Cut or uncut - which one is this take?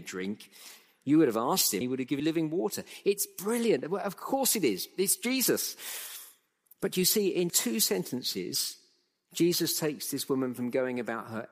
cut